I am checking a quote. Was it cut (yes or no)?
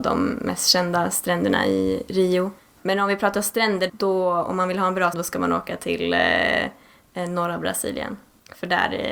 yes